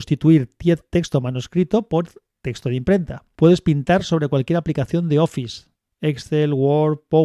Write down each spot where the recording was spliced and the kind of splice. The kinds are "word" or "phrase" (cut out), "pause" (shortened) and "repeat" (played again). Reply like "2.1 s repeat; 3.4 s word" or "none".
none